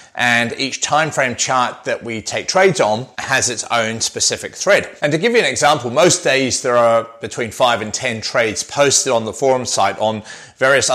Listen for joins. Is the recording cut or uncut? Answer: cut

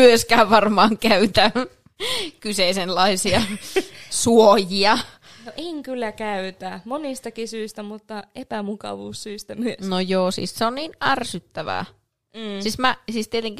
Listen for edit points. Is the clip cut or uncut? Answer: uncut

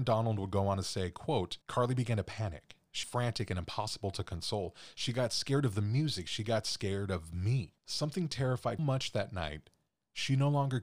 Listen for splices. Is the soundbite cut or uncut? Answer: cut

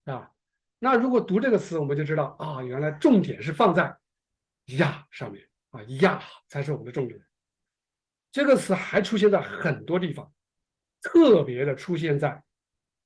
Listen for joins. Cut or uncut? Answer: uncut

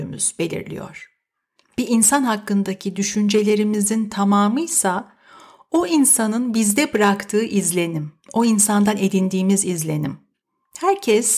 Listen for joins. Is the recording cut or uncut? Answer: cut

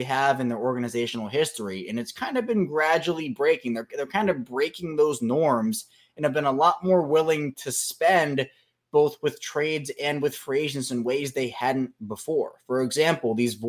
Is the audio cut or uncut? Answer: uncut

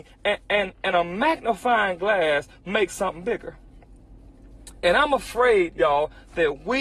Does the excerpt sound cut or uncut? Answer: cut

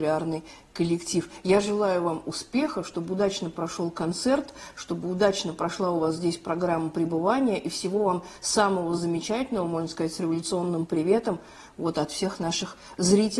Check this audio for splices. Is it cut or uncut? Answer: uncut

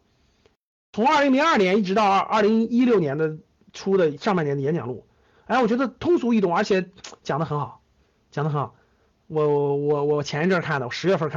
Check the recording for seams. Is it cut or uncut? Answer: uncut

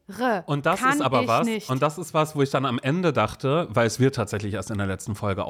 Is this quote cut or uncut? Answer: uncut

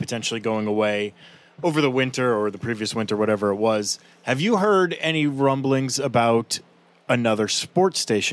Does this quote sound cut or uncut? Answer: uncut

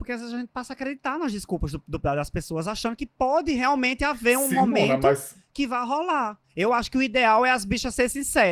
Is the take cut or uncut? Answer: cut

